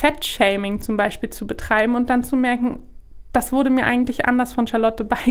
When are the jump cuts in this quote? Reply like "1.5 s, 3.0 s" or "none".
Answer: none